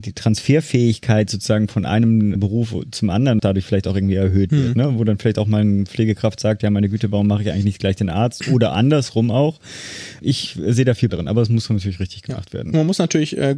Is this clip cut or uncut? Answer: cut